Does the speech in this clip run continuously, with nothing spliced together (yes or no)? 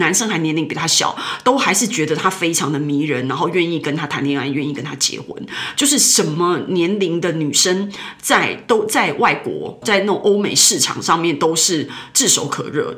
no